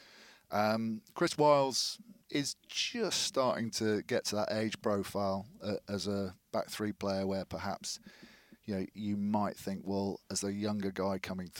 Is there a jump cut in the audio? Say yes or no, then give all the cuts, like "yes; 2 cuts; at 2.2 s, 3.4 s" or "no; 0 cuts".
yes; 1 cut; at 2.2 s